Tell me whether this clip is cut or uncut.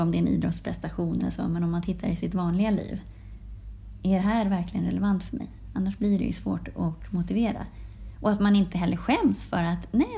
uncut